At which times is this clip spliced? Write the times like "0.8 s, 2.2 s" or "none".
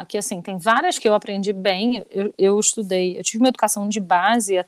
1.0 s